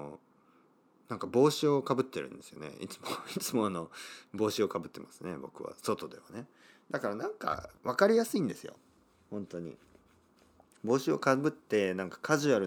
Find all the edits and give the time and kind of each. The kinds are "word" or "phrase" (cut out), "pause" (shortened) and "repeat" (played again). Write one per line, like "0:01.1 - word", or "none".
0:07.8 - pause

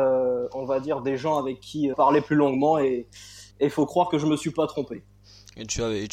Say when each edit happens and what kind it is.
0:01.9 - phrase
0:03.5 - pause

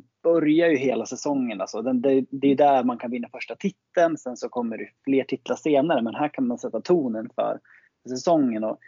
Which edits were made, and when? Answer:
0:05.0 - pause

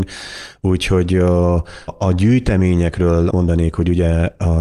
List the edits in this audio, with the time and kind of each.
0:01.9 - word
0:03.3 - word

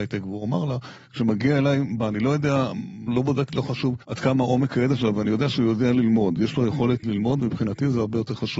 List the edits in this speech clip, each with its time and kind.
0:02.0 - phrase
0:03.1 - word
0:04.0 - pause
0:07.0 - word

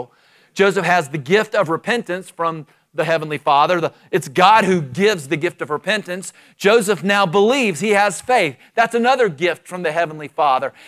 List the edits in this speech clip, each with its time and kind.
none

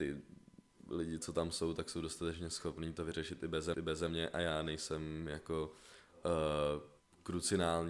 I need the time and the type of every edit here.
0:03.7 - repeat
0:07.0 - pause

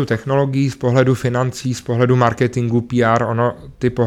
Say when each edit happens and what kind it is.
none

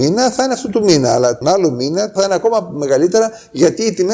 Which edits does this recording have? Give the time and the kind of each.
0:01.4 - word
0:02.2 - word

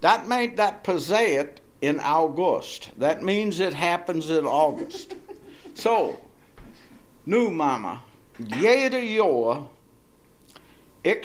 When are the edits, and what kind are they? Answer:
none

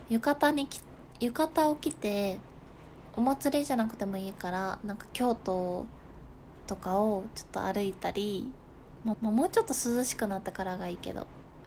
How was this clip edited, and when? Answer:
0:09.1 - repeat

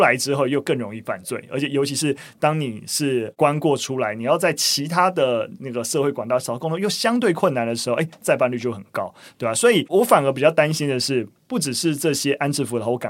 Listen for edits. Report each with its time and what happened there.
none

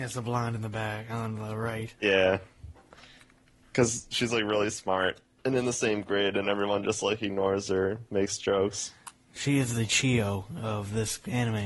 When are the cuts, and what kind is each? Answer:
0:02.0 - pause

